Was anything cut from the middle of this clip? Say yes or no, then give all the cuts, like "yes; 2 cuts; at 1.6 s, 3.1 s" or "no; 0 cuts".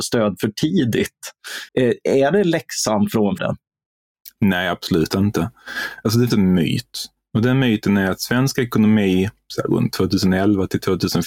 yes; 3 cuts; at 1.7 s, 3.4 s, 6.3 s